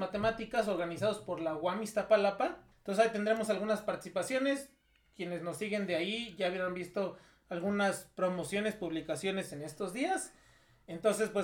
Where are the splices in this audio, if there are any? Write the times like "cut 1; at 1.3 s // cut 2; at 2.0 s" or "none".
cut 1; at 2.7 s